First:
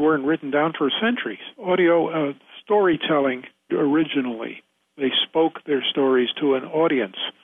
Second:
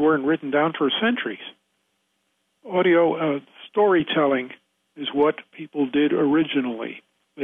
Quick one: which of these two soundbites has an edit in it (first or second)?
first